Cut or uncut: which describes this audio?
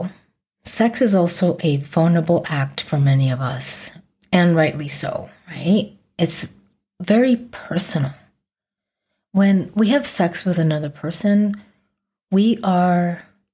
uncut